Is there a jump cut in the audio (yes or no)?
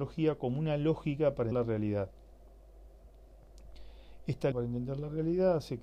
yes